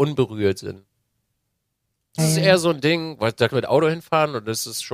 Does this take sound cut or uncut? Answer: cut